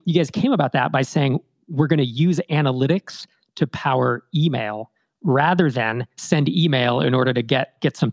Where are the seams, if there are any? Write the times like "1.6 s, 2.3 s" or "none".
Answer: none